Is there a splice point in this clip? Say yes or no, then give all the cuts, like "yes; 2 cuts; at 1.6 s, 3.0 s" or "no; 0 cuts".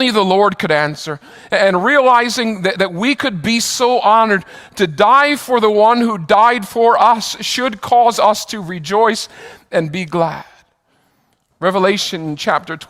no; 0 cuts